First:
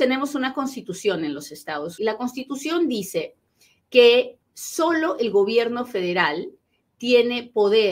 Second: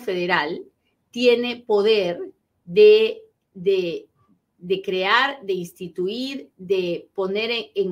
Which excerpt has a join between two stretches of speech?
first; 2 cuts; at 2.0 s, 4.4 s

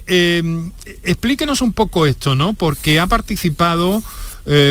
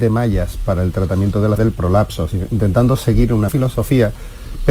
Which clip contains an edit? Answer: second; 2 cuts; at 1.6 s, 3.5 s

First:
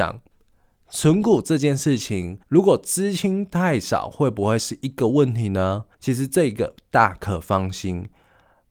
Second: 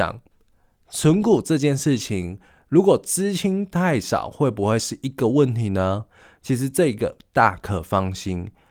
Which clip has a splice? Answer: first; 2 cuts; at 2.4 s, 5.9 s

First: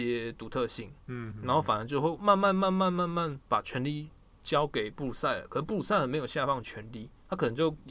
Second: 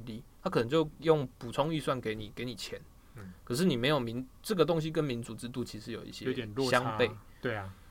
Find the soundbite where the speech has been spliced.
first; 1 cut; at 1.3 s

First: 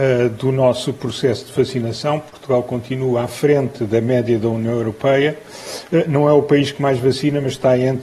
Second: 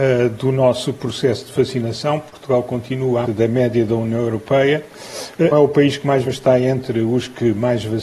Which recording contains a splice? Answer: second; 3 cuts; at 3.2 s, 5.5 s, 6.2 s

